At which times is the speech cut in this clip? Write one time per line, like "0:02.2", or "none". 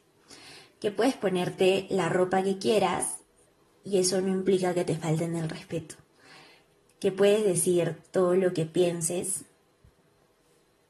none